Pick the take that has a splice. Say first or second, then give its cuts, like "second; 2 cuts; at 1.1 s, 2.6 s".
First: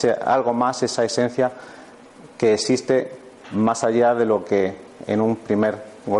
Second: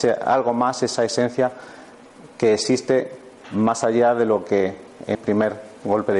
second; 1 cut; at 5.1 s